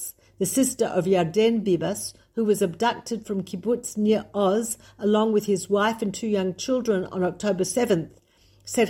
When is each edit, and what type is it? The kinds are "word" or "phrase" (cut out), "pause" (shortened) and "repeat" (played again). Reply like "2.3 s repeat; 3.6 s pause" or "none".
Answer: none